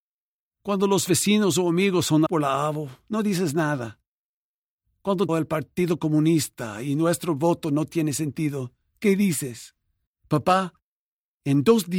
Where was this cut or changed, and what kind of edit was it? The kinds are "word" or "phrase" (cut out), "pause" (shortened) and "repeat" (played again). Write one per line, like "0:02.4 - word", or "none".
0:02.3 - word
0:05.3 - phrase
0:10.1 - pause